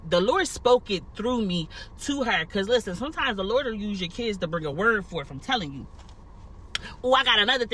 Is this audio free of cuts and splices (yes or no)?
yes